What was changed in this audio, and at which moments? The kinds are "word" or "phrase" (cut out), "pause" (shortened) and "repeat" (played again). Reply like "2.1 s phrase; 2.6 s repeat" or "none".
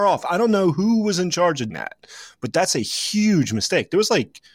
1.7 s word